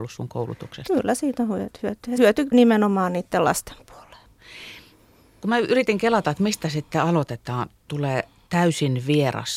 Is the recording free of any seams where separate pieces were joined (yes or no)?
no